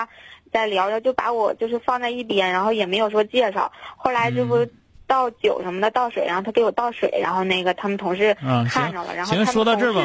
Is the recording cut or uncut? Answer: uncut